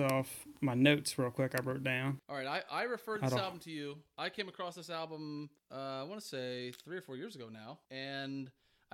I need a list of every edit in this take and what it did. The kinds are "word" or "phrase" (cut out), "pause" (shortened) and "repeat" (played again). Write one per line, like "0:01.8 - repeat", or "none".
0:02.2 - pause
0:05.6 - pause
0:07.8 - pause